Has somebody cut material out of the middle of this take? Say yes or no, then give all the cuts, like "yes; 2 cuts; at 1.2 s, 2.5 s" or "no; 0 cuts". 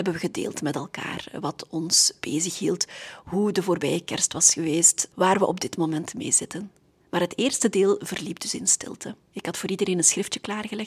no; 0 cuts